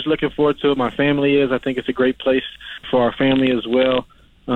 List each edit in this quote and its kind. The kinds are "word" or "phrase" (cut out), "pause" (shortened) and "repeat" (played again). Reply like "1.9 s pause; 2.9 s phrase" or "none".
2.8 s word